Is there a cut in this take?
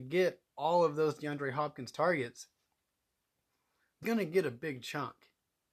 yes; 1 cut; at 4.0 s

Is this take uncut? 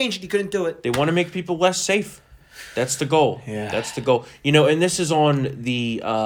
yes; 0 cuts

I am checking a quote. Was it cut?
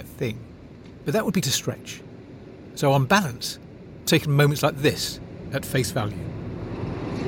yes; 2 cuts; at 1.4 s, 4.1 s

